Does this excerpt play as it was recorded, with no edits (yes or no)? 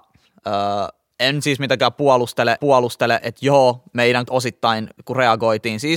no